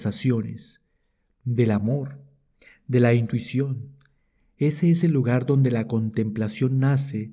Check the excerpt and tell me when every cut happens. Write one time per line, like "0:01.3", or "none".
none